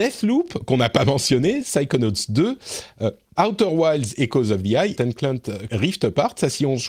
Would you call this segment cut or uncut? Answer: cut